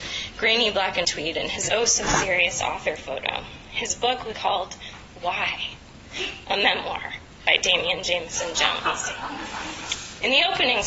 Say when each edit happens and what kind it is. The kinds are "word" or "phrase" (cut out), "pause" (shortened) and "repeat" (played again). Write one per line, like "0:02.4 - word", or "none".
0:01.0 - word
0:01.7 - word
0:04.3 - word
0:06.4 - word

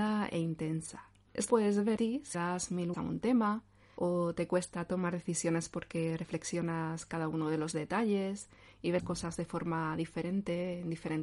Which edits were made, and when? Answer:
0:01.5 - word
0:02.0 - word
0:02.3 - word
0:02.9 - word
0:09.0 - word

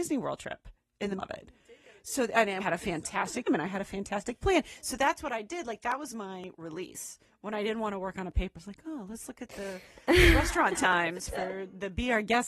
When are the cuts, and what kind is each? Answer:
0:01.2 - word
0:02.6 - word
0:03.5 - word
0:08.6 - word

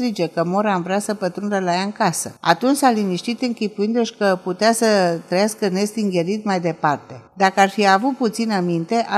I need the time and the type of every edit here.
0:02.4 - pause
0:07.3 - pause

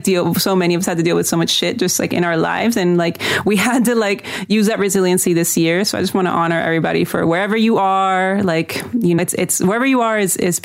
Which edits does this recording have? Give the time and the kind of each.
0:09.2 - word

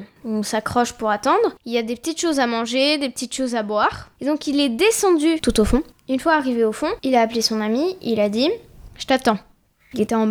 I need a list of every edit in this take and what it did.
0:01.6 - pause

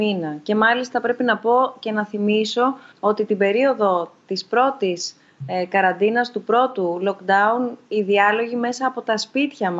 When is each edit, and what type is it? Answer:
0:02.9 - pause

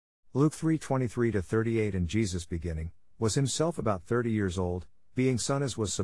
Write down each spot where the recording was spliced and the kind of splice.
none

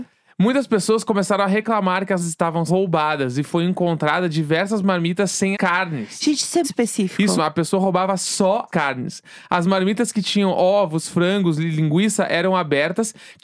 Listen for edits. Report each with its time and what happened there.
0:02.2 - word
0:02.7 - word
0:05.5 - word
0:06.6 - word
0:07.4 - word
0:08.7 - word

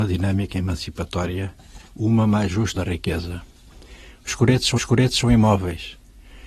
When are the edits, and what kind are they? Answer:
0:01.9 - pause
0:02.8 - word
0:04.8 - repeat

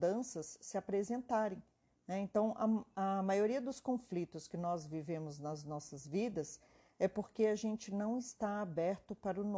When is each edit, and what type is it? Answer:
none

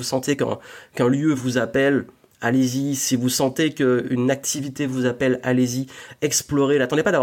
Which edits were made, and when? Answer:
none

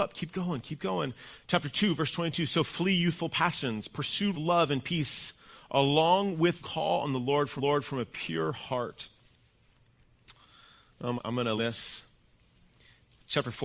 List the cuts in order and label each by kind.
0:04.3 - phrase
0:06.6 - phrase
0:07.6 - repeat
0:11.2 - phrase
0:11.6 - phrase

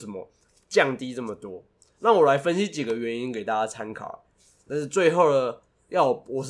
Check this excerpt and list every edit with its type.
none

